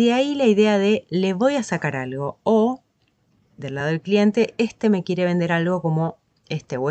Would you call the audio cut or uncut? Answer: uncut